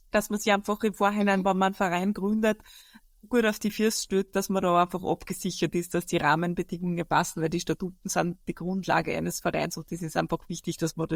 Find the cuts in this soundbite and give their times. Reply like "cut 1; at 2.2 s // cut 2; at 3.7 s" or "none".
none

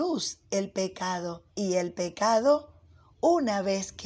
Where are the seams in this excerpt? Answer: cut 1; at 1.5 s

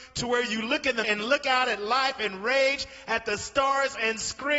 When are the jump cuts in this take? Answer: cut 1; at 1.0 s

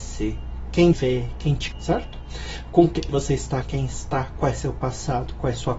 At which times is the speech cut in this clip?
cut 1; at 0.9 s // cut 2; at 1.7 s // cut 3; at 3.1 s // cut 4; at 3.6 s

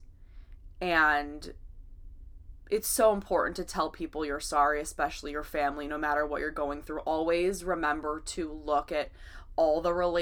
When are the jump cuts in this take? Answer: none

